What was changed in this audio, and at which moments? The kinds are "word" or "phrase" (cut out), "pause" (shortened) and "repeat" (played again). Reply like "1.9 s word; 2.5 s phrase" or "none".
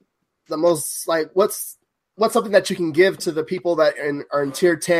none